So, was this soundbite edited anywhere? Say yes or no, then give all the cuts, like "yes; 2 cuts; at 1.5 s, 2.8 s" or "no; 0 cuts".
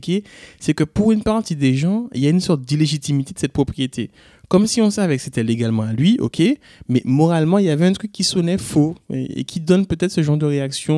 no; 0 cuts